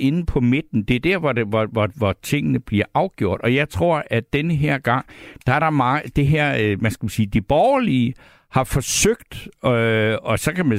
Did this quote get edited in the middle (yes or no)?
no